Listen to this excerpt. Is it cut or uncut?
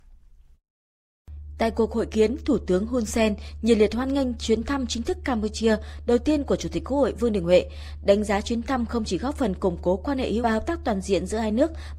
cut